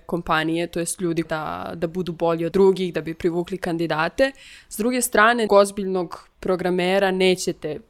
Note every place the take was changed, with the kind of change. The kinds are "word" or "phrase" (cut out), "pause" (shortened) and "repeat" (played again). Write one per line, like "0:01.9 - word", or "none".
0:01.3 - phrase
0:02.5 - word
0:05.5 - word